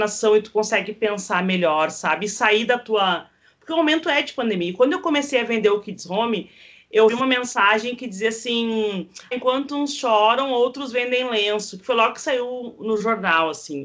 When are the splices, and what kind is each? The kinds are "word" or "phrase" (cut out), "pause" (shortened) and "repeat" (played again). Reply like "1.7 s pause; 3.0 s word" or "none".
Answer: 7.1 s word; 9.3 s word